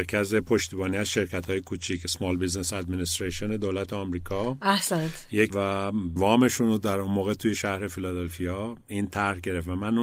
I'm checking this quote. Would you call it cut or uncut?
cut